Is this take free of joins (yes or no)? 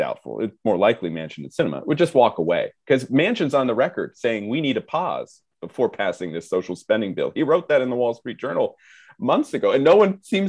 yes